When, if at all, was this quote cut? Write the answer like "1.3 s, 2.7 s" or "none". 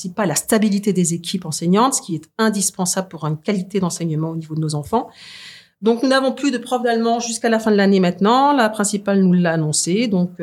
none